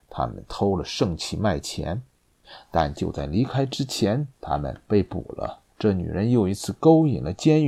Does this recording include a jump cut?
yes; 2 cuts; at 4.3 s, 5.7 s

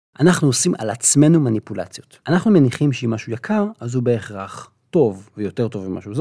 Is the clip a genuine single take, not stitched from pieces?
no; 1 cut; at 2.2 s

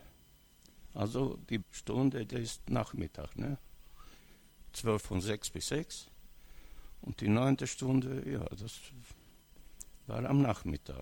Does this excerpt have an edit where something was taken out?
yes; 3 cuts; at 1.6 s, 2.3 s, 5.0 s

